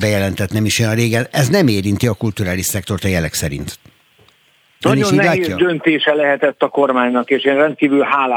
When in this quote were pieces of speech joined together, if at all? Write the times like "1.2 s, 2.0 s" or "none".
none